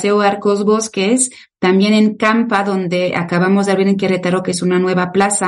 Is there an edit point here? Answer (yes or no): no